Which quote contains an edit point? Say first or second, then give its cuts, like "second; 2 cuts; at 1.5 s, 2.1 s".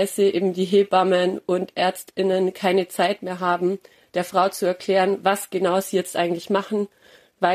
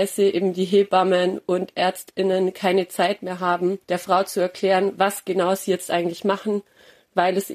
second; 1 cut; at 3.8 s